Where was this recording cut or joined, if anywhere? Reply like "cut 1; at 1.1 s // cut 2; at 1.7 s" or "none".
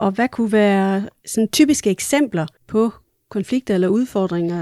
cut 1; at 2.6 s